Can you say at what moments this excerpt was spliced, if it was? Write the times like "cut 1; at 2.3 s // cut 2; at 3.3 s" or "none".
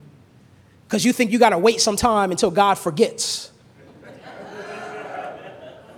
none